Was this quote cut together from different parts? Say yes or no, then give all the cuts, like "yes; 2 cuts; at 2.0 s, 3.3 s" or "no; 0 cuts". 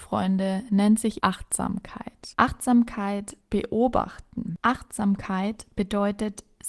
yes; 2 cuts; at 1.2 s, 3.4 s